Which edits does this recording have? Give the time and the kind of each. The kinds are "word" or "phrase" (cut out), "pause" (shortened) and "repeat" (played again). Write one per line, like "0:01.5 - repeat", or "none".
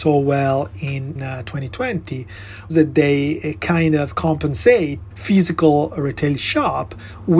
0:01.2 - word
0:02.7 - word
0:05.1 - phrase